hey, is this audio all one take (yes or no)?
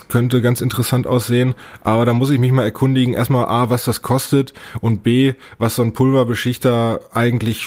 yes